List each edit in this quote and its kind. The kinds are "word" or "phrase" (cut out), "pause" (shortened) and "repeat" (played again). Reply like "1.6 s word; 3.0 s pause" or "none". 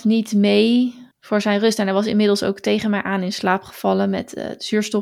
1.1 s pause